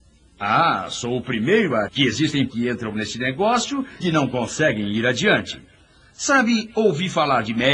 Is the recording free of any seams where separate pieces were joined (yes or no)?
no